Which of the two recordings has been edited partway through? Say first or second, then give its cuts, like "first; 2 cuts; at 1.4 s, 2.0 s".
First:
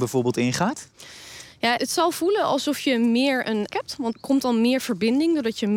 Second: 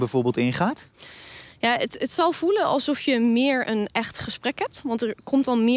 first; 3 cuts; at 1.8 s, 3.7 s, 4.1 s